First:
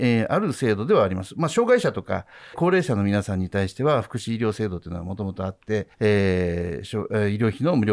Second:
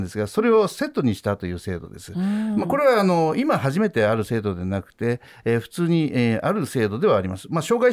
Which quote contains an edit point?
first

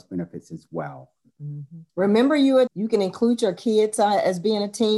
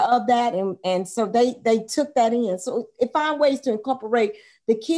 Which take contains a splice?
first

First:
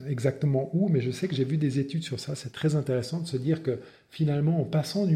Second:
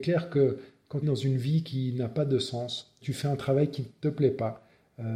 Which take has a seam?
second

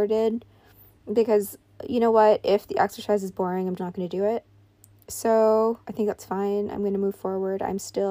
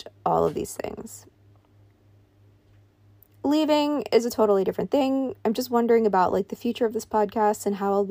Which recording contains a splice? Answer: first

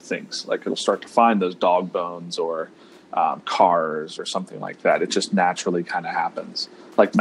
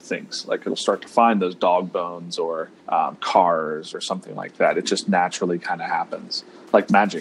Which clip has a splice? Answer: second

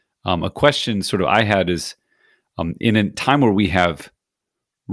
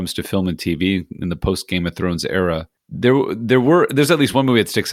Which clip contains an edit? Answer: second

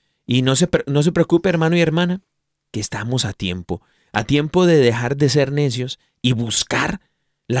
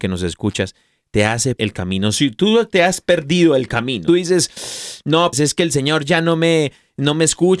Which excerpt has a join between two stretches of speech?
second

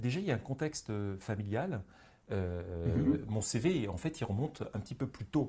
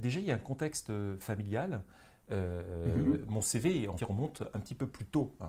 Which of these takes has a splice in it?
second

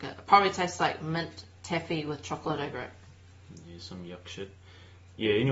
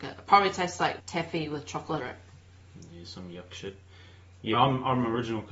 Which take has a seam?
second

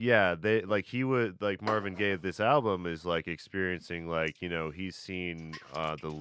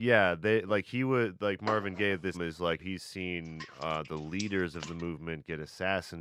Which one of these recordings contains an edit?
second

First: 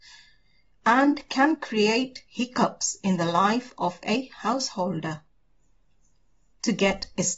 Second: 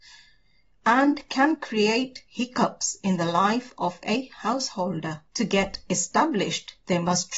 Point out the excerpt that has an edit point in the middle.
second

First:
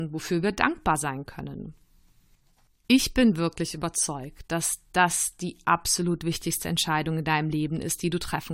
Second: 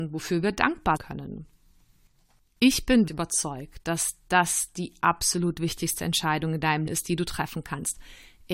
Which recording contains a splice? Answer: second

